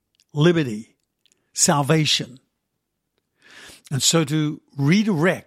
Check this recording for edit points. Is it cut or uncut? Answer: uncut